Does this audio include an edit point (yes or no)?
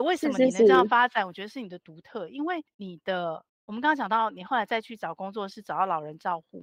yes